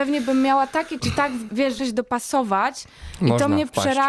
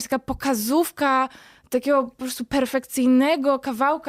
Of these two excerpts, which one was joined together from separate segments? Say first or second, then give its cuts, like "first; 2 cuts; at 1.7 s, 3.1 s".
first; 3 cuts; at 1.0 s, 1.5 s, 1.8 s